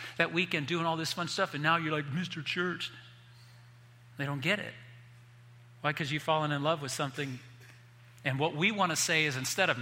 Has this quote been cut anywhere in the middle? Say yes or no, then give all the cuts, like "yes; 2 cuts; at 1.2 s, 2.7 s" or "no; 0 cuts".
no; 0 cuts